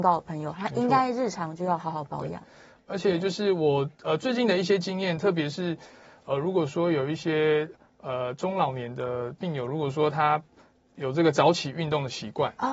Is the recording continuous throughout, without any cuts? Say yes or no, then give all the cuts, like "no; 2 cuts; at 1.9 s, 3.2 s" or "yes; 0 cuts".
yes; 0 cuts